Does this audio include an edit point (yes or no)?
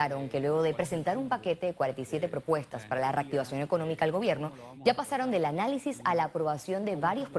no